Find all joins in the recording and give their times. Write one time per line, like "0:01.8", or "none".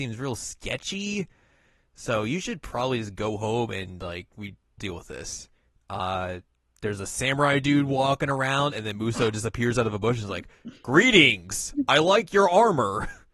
0:04.8